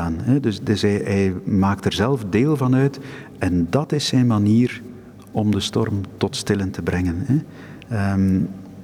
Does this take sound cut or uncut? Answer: uncut